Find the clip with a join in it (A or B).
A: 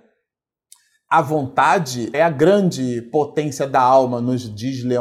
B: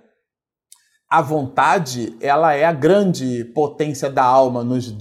A